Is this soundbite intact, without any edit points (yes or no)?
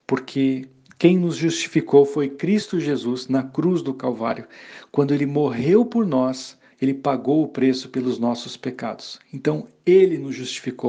no